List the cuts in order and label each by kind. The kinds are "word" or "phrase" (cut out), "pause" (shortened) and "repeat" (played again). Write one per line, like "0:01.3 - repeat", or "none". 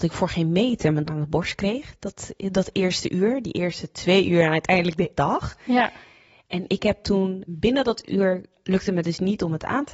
0:01.1 - word
0:05.2 - word
0:07.5 - word